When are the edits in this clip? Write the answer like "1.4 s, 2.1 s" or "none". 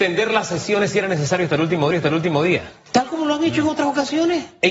1.9 s